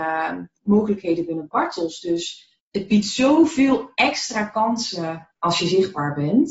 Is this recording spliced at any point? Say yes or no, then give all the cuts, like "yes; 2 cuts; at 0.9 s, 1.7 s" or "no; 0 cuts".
yes; 2 cuts; at 2.6 s, 5.3 s